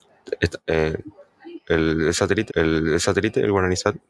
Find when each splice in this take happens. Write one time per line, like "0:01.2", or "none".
0:02.5